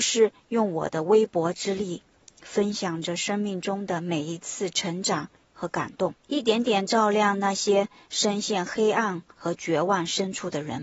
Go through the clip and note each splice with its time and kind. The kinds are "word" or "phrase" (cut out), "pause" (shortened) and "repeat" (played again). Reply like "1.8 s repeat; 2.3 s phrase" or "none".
6.2 s pause

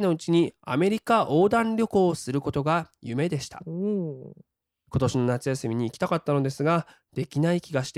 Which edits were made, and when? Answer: none

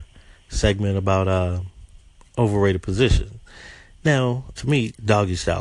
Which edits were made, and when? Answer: 4.5 s word

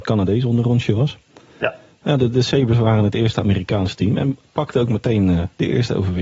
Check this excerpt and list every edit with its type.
none

